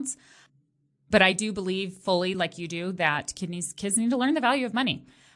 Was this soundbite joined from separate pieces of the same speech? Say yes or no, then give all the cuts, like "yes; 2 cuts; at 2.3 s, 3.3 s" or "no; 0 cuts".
no; 0 cuts